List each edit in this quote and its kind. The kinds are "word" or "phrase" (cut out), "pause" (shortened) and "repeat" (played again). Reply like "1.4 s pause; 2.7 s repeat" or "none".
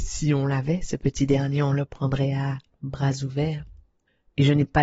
none

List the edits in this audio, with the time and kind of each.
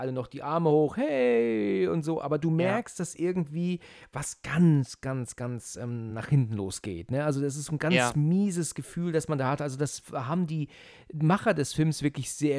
none

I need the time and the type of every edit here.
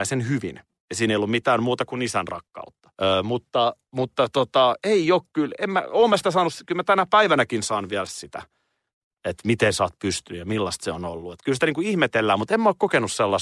2.9 s pause; 8.1 s word

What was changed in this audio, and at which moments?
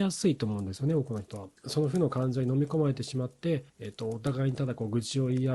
1.6 s pause; 3.7 s pause

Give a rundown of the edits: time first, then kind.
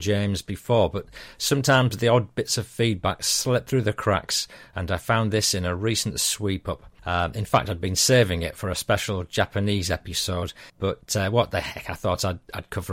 7.0 s pause; 10.7 s pause

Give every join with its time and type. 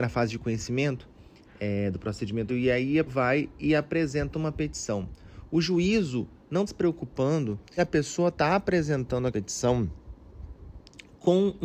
2.5 s word; 3.1 s word; 6.7 s word; 7.8 s word; 9.3 s word

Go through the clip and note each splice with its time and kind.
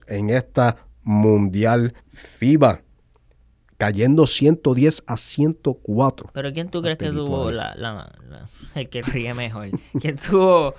2.0 s pause; 9.0 s phrase

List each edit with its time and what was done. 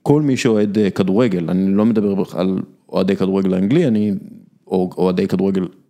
none

